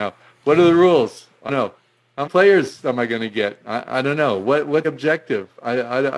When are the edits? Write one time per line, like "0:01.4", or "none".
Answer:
0:01.5
0:02.3
0:04.8